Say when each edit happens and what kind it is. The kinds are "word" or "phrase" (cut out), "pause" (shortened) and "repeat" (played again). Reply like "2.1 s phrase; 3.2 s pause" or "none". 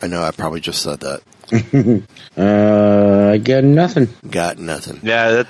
none